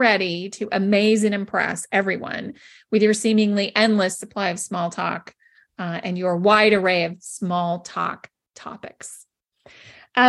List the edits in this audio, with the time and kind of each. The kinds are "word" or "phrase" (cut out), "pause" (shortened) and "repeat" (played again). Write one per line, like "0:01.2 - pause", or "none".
none